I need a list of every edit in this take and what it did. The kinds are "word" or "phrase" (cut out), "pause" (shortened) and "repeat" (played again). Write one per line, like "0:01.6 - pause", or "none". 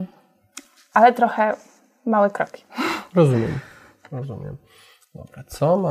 none